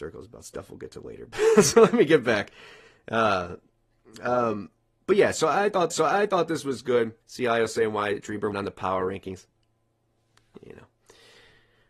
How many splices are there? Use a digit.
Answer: 3